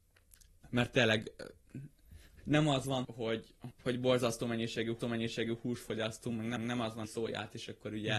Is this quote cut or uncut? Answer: cut